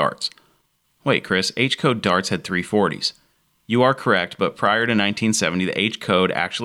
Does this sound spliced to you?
no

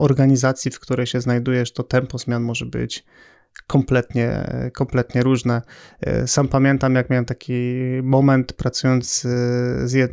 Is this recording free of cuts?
yes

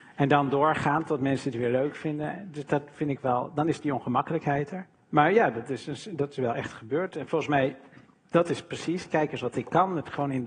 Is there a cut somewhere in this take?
no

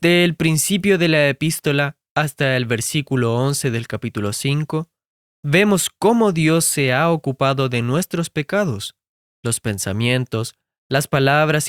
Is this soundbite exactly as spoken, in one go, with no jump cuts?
yes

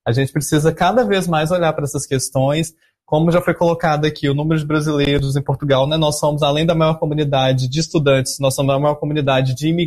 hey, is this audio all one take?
yes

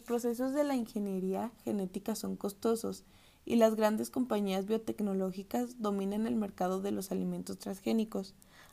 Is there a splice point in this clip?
no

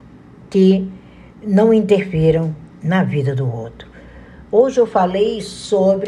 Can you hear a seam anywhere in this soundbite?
no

